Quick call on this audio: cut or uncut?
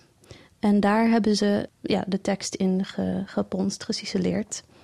cut